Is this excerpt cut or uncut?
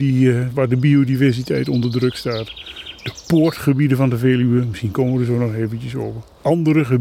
uncut